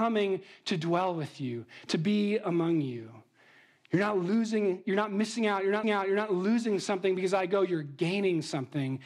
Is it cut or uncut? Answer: cut